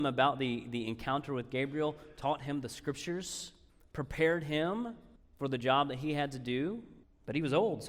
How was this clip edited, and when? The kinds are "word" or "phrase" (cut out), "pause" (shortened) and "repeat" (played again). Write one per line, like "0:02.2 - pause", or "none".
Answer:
none